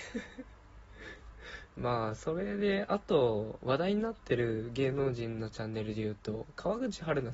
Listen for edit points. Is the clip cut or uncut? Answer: cut